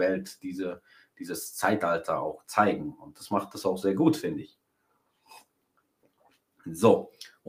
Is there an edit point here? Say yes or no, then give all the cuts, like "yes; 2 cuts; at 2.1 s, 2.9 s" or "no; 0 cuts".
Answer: no; 0 cuts